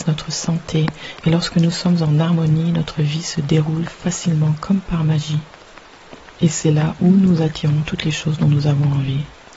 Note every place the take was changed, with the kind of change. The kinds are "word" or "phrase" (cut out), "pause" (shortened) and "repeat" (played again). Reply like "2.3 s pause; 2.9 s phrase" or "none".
none

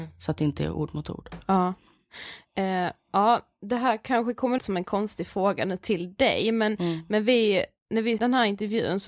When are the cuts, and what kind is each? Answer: 4.6 s word; 8.2 s word

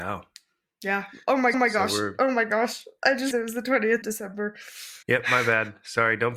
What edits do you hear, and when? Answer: 1.5 s repeat; 3.3 s word; 4.0 s word; 5.0 s pause

